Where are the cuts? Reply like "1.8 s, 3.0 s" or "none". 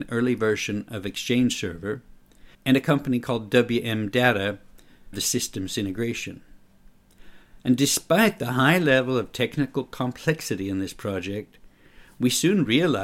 2.5 s, 5.1 s

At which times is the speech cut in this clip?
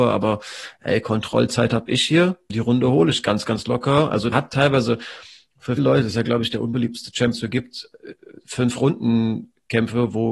2.5 s, 4.3 s, 5.8 s, 7.3 s

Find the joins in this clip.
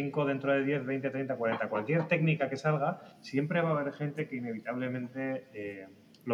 3.1 s

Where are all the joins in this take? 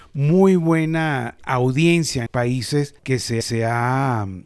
1.4 s, 2.3 s, 3.0 s, 3.4 s

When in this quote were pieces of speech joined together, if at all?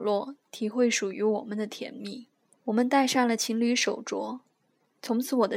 2.5 s

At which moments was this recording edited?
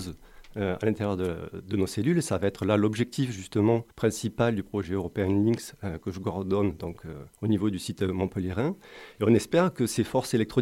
3.9 s, 7.3 s

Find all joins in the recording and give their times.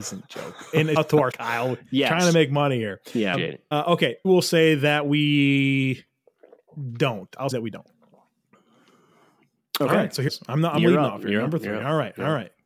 1.0 s, 1.3 s, 3.3 s, 3.7 s, 4.2 s, 7.5 s, 10.3 s, 10.8 s

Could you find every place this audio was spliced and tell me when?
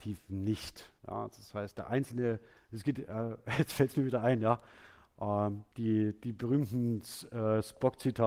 1.0 s, 2.5 s, 5.7 s

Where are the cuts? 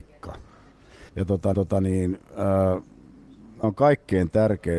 1.1 s, 1.5 s, 3.6 s

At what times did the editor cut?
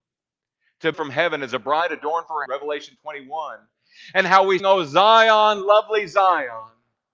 0.9 s, 2.5 s, 4.6 s

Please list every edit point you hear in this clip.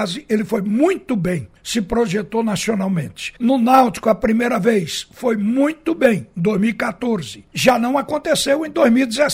1.6 s, 3.4 s, 7.5 s

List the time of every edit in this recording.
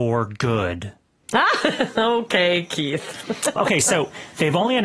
3.6 s

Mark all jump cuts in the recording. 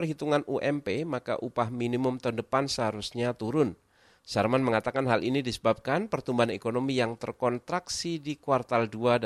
none

